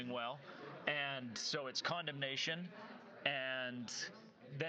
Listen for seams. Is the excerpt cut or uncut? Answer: uncut